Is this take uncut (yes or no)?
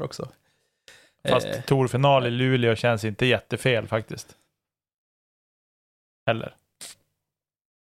yes